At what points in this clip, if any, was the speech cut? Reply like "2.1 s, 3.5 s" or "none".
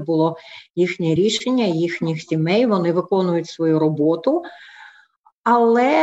none